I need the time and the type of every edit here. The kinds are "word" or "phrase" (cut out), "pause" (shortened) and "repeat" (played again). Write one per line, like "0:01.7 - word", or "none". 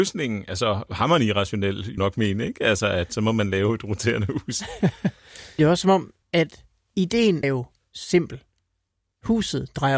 0:02.0 - phrase
0:06.2 - pause
0:07.4 - word